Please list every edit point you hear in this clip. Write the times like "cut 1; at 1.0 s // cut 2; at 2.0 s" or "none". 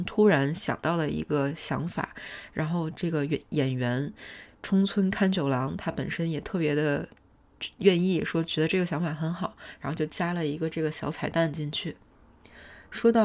none